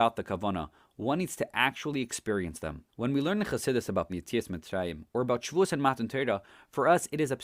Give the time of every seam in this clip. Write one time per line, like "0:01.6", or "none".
0:02.9
0:04.1